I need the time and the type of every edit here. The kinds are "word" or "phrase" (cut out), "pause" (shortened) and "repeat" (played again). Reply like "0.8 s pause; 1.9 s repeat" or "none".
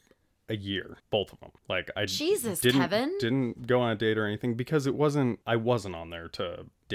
1.0 s pause; 1.6 s pause; 5.4 s pause